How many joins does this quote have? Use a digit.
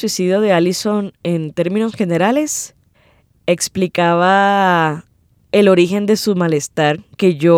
1